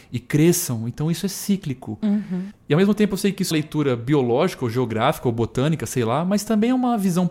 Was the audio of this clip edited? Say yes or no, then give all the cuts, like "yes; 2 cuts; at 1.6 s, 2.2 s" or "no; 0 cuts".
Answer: yes; 1 cut; at 3.5 s